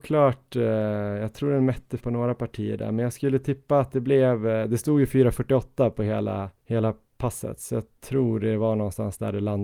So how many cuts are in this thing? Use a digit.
2